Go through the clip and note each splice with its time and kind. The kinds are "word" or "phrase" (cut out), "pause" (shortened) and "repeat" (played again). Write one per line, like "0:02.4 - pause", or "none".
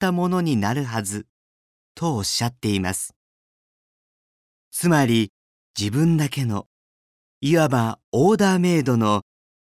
none

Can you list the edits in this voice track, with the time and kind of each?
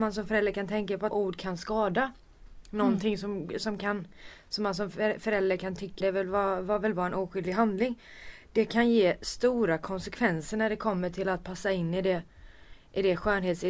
0:01.1 - word
0:06.0 - phrase

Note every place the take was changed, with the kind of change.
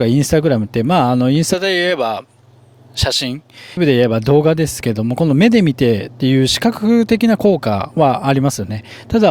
0:03.8 - word

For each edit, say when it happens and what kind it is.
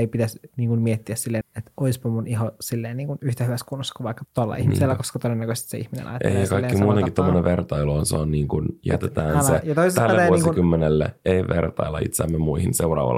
0:01.4 - word
0:04.2 - word

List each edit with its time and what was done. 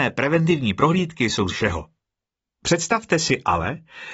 0:01.5 - word

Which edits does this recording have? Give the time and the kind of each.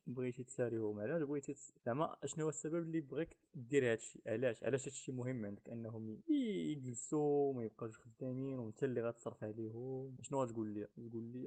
0:01.8 - pause

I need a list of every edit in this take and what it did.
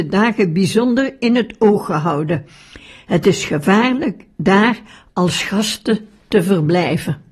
none

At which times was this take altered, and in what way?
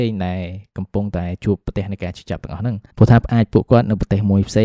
0:02.9 - pause

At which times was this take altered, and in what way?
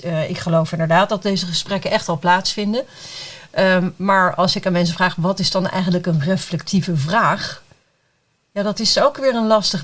none

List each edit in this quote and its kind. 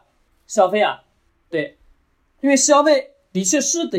none

